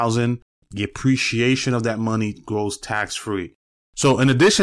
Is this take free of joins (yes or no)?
yes